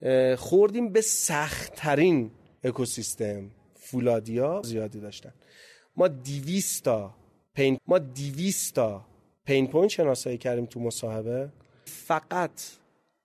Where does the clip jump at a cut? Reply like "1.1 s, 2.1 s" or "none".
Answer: 4.6 s, 7.8 s, 11.9 s